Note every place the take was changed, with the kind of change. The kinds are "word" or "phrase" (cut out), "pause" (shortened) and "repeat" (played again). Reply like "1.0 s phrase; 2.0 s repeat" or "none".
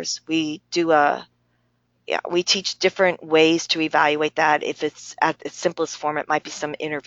none

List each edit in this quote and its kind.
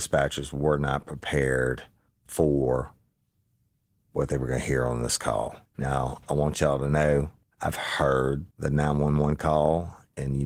2.1 s pause; 5.7 s pause; 7.4 s pause; 8.5 s pause

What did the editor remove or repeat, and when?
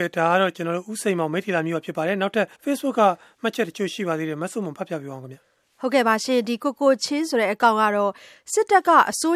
2.5 s pause

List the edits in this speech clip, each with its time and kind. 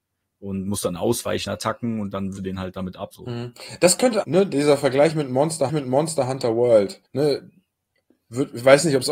1.5 s word; 2.4 s word; 3.1 s word; 4.2 s word; 5.7 s repeat; 7.0 s pause

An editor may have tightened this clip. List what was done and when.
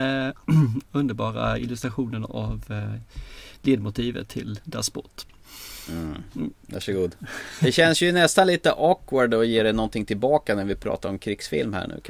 none

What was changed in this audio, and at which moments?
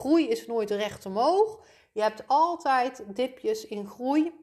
none

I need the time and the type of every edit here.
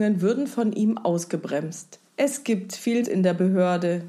2.1 s pause; 3.0 s word

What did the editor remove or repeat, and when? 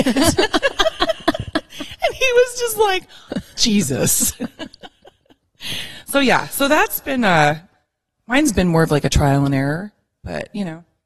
3.3 s word

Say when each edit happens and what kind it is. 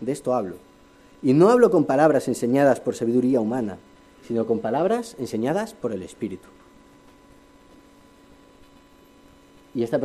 none

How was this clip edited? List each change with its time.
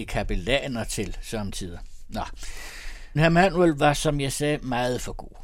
3.2 s word

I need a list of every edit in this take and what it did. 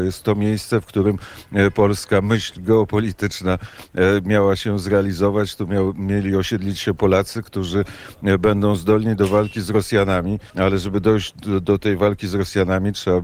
10.5 s pause

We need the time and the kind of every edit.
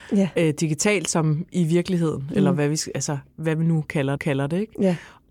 4.2 s repeat

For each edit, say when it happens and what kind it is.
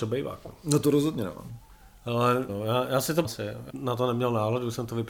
2.5 s word; 3.2 s word; 3.7 s word

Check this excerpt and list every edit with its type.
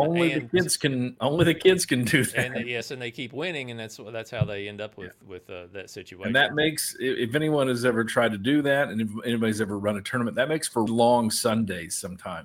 10.9 s word

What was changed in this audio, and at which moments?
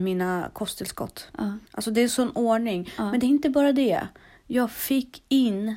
1.7 s pause

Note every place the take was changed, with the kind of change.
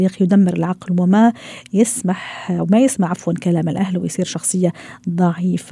none

